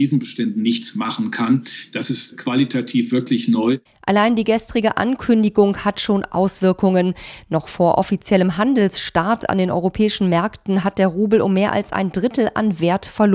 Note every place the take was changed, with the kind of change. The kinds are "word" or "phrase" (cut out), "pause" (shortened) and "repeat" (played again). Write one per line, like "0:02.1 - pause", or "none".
none